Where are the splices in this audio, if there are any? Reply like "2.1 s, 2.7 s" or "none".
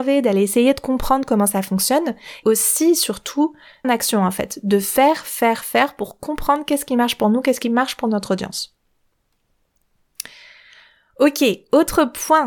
2.4 s, 3.8 s